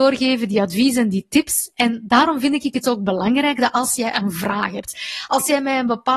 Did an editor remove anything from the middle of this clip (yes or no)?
no